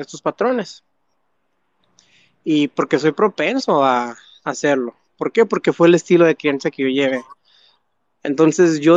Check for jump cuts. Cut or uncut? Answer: uncut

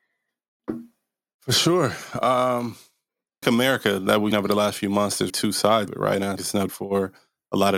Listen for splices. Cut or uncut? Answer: cut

